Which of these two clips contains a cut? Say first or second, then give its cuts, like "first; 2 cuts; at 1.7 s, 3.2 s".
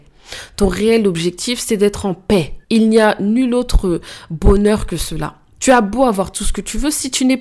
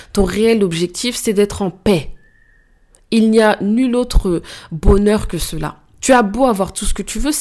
first; 1 cut; at 2.6 s